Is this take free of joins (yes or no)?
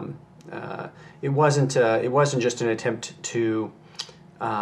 yes